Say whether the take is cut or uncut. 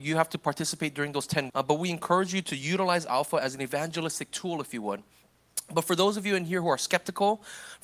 cut